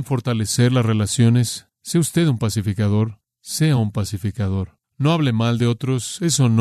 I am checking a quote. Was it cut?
no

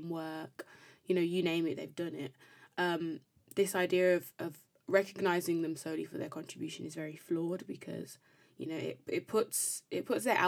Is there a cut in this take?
no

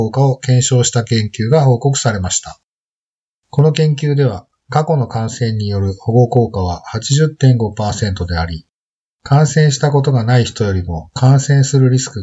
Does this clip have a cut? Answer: no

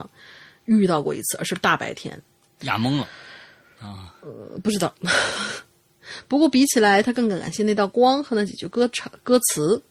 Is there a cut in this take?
no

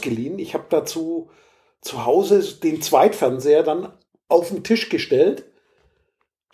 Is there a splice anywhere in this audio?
no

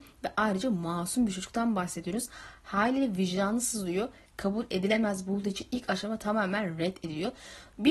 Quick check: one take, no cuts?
yes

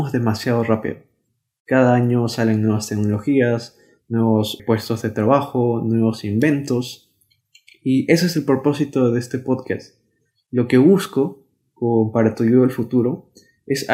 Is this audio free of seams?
no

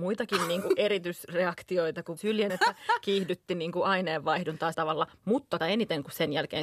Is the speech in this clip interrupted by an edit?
yes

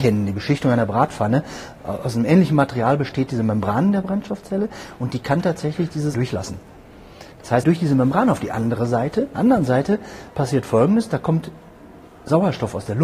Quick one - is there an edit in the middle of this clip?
yes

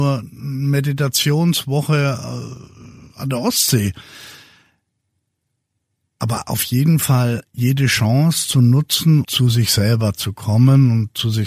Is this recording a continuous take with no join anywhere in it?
no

